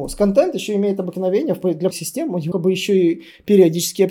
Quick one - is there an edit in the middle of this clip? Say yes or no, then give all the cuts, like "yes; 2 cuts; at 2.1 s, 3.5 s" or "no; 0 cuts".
yes; 2 cuts; at 1.9 s, 2.5 s